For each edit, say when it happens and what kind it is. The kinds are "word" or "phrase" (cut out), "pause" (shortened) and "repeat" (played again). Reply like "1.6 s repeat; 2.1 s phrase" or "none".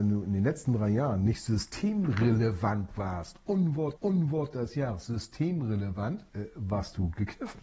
4.0 s repeat; 6.3 s pause